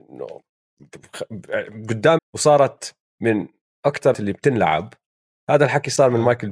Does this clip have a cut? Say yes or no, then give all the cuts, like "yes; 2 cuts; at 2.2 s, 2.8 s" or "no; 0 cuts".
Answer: yes; 2 cuts; at 2.2 s, 4.1 s